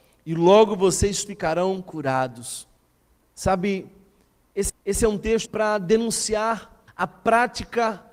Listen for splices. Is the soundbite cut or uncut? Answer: cut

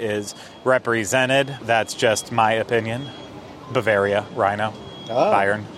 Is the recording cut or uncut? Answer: cut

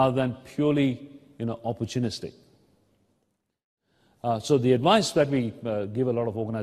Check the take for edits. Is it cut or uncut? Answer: uncut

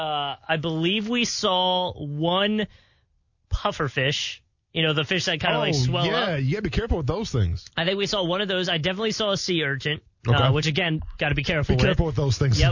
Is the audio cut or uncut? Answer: uncut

